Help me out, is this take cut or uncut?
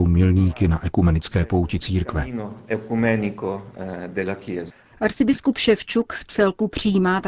uncut